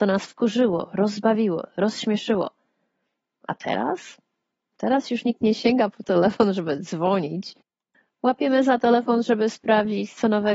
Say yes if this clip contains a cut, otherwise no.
no